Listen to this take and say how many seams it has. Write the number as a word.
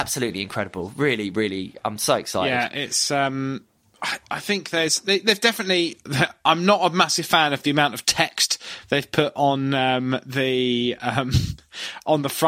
zero